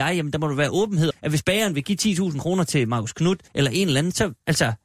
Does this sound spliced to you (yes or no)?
yes